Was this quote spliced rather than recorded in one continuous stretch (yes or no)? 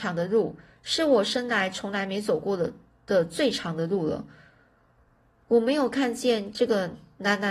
no